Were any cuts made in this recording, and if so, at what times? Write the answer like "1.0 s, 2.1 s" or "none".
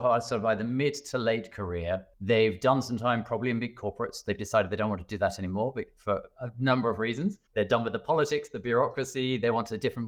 2.1 s, 7.5 s

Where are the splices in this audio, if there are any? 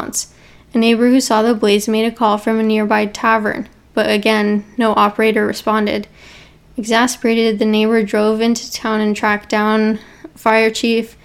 none

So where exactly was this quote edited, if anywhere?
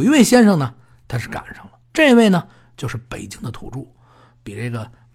1.8 s

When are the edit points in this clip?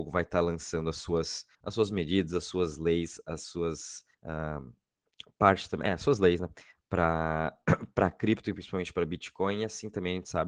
1.5 s, 4.1 s

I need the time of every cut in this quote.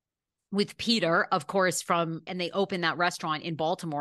2.3 s

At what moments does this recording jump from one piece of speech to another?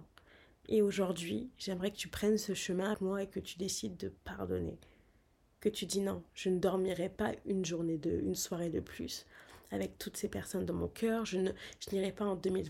2.9 s

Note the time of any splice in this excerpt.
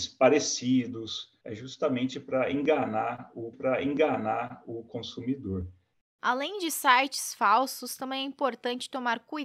1.4 s, 3.5 s

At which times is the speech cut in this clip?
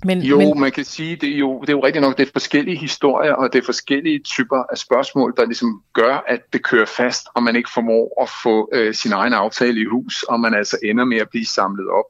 none

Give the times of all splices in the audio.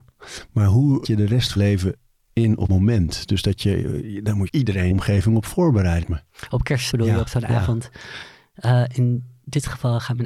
1.0 s, 1.6 s, 2.7 s, 4.5 s, 4.9 s, 6.0 s, 6.9 s

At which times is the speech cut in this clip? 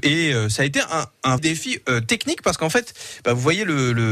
1.4 s

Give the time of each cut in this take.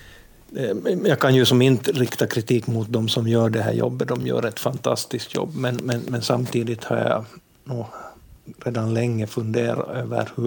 none

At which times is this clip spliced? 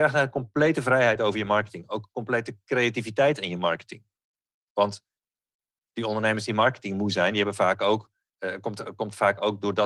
none

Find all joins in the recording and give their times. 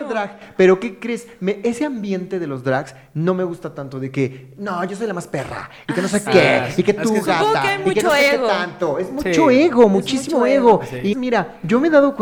11.1 s

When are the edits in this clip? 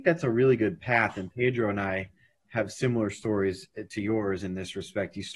none

